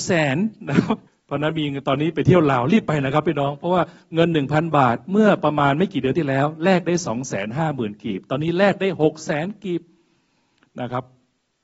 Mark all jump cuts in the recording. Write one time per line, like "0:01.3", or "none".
0:01.1